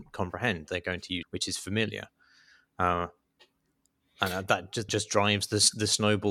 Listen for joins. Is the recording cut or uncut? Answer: cut